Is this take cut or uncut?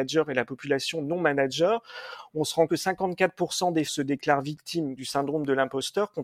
cut